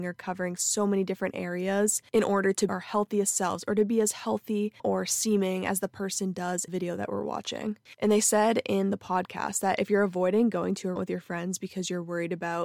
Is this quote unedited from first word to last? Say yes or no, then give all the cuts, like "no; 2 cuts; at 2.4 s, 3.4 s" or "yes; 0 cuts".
no; 4 cuts; at 2.7 s, 4.8 s, 6.7 s, 11.0 s